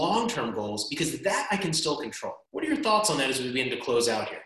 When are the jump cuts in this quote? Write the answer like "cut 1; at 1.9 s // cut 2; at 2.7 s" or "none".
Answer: cut 1; at 2.5 s